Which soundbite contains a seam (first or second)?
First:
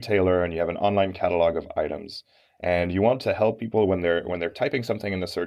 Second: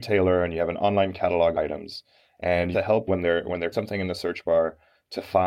second